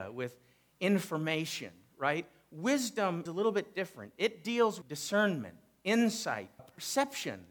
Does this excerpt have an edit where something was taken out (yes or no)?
yes